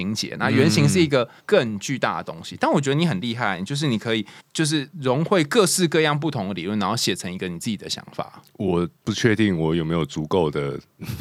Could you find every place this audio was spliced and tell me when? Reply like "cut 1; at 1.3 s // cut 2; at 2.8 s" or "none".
cut 1; at 1.4 s // cut 2; at 4.4 s // cut 3; at 4.9 s // cut 4; at 9.0 s